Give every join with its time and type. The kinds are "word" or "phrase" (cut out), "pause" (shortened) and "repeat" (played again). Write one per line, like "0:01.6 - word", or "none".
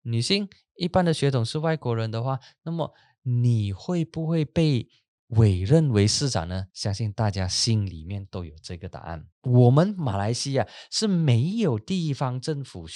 0:06.7 - pause
0:09.3 - pause